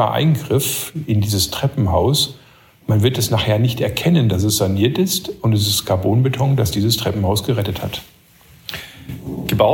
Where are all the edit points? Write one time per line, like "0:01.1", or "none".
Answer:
none